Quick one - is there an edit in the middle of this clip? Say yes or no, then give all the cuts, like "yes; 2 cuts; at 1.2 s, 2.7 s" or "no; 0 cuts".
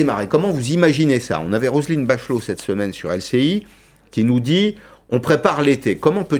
no; 0 cuts